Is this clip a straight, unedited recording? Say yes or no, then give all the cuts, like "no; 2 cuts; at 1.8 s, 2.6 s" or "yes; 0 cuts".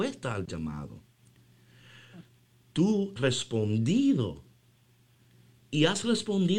no; 1 cut; at 3.2 s